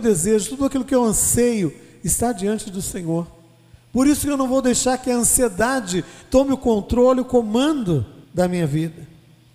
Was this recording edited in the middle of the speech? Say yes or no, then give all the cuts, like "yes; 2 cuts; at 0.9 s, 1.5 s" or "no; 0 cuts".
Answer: yes; 1 cut; at 8.2 s